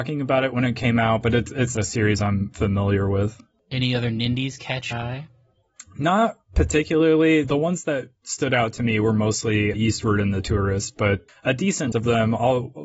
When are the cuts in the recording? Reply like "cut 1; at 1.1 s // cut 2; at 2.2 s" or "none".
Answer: cut 1; at 1.8 s // cut 2; at 4.9 s // cut 3; at 7.4 s // cut 4; at 9.7 s // cut 5; at 11.3 s // cut 6; at 11.9 s